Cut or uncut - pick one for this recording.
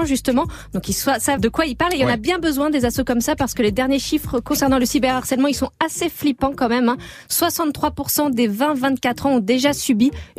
cut